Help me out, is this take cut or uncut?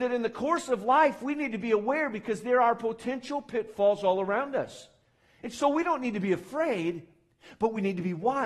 uncut